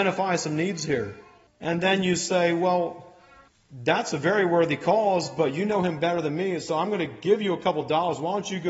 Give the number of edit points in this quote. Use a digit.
2